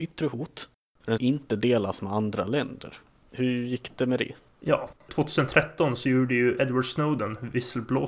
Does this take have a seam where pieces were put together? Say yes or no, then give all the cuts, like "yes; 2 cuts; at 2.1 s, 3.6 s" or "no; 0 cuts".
yes; 1 cut; at 1.2 s